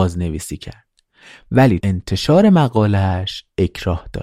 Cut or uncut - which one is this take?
cut